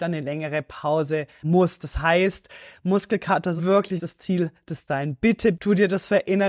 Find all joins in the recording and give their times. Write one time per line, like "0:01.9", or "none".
0:01.4
0:03.6
0:04.0
0:04.9
0:05.5